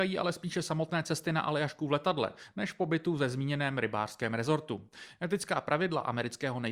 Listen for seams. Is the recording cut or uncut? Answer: uncut